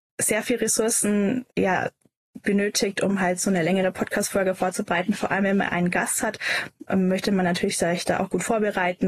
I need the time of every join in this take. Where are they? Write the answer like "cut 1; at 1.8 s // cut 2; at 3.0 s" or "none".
cut 1; at 1.5 s